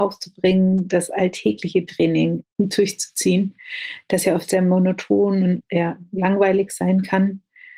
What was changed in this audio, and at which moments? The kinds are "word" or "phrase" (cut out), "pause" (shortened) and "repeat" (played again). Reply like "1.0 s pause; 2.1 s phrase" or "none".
none

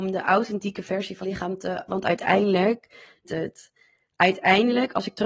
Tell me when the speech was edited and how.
1.2 s word; 1.9 s word; 3.2 s word

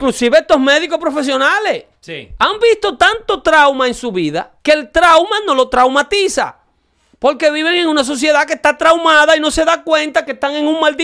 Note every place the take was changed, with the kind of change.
4.6 s pause

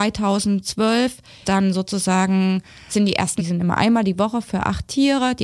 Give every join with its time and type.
1.4 s word; 2.9 s word; 3.4 s word

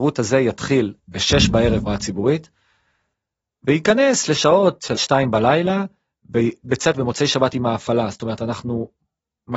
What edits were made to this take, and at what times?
1.0 s pause; 1.9 s phrase; 4.9 s word; 6.6 s word; 6.9 s word

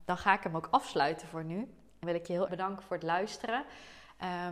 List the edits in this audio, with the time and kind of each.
2.0 s word; 2.5 s word

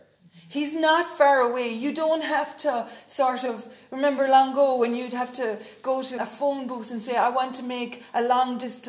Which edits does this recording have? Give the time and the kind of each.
6.2 s word

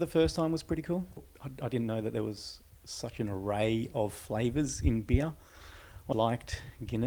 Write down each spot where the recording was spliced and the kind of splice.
6.1 s word

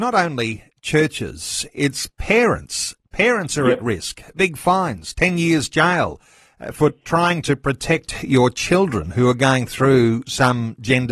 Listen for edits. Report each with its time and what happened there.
none

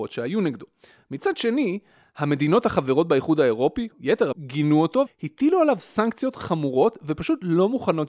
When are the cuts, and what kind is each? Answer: 3.9 s word; 4.3 s phrase; 5.1 s word

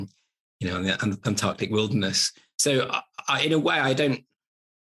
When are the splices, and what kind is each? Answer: none

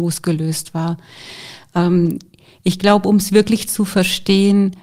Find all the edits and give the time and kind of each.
none

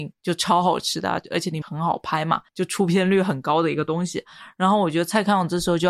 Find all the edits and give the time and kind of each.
1.6 s word; 2.5 s pause

